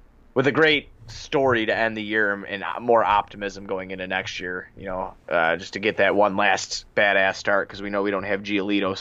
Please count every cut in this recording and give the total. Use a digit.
2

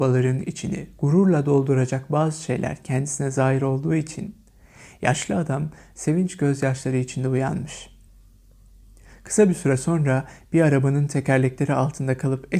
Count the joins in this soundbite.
0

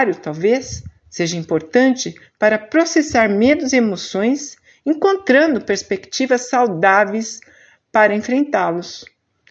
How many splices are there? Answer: 0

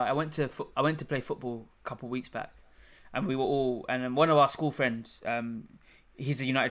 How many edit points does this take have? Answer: 0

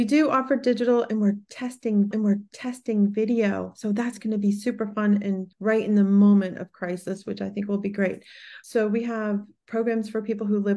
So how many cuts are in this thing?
2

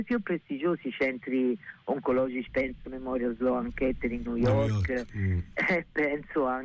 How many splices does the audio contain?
3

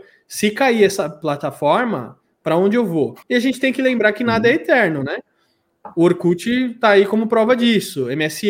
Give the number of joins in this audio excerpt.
1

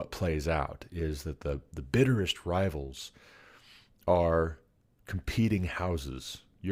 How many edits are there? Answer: 0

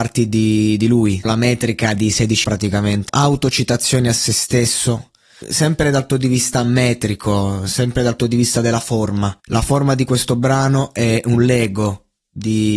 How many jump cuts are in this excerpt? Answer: 7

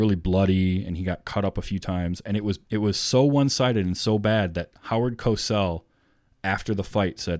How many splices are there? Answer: 1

